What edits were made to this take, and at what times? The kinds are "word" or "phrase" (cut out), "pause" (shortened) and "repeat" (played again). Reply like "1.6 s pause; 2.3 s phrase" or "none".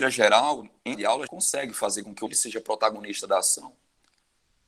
0.9 s word; 1.3 s word; 2.3 s word